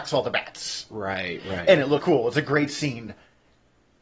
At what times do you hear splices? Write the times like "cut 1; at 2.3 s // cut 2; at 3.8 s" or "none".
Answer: cut 1; at 2.0 s